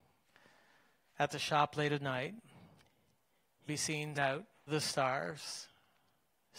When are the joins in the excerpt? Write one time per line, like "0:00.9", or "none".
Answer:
0:03.7
0:04.1
0:04.7